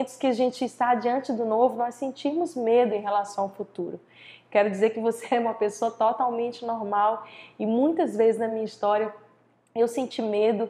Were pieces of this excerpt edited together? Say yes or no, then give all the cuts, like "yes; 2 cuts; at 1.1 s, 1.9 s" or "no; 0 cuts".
no; 0 cuts